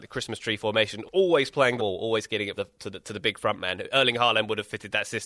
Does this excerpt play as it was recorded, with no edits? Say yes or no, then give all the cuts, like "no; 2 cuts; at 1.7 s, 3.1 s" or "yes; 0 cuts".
no; 3 cuts; at 1.0 s, 1.8 s, 2.6 s